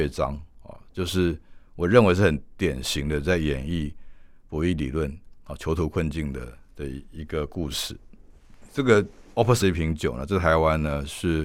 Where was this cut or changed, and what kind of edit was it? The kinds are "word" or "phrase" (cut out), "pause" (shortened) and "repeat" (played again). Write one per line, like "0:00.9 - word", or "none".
0:09.6 - word